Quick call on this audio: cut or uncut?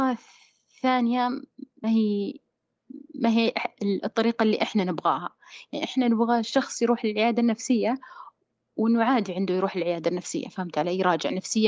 cut